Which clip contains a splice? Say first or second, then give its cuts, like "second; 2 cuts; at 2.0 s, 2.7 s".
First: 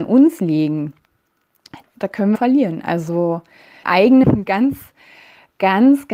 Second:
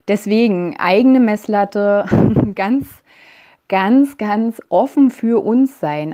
first; 4 cuts; at 1.8 s, 2.3 s, 3.8 s, 4.2 s